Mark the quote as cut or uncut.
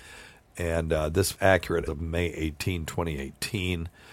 cut